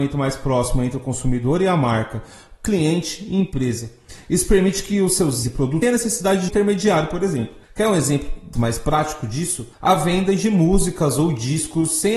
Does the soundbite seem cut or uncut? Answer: cut